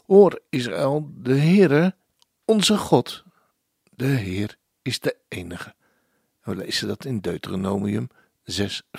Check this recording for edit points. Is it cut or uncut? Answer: uncut